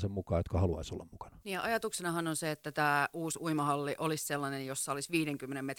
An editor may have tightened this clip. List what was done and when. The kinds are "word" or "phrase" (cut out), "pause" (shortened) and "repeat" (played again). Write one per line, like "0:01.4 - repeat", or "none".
0:01.4 - pause